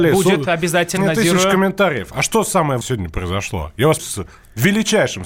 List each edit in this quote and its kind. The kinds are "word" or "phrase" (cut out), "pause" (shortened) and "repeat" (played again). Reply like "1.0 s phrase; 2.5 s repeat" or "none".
1.0 s word; 2.8 s word; 4.0 s word